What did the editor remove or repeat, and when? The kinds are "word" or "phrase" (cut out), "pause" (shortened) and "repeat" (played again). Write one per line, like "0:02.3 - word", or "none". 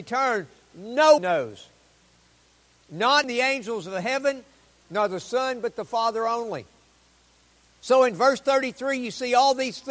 0:01.2 - word
0:03.2 - word